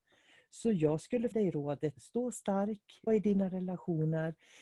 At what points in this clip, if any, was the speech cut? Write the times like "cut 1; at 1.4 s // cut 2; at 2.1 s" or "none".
cut 1; at 1.3 s // cut 2; at 2.0 s // cut 3; at 3.1 s